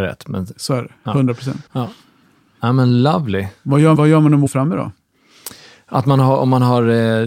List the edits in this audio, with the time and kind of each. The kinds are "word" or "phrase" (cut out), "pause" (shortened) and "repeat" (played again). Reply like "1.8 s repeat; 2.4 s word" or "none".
1.7 s pause; 3.9 s word; 4.5 s word